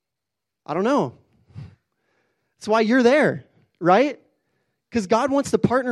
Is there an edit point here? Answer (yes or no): no